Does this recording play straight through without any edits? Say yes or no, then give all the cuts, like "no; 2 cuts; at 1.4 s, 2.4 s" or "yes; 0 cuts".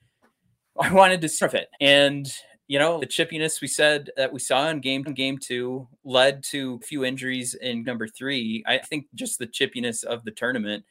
no; 7 cuts; at 1.4 s, 1.7 s, 3.0 s, 5.1 s, 6.8 s, 7.8 s, 8.8 s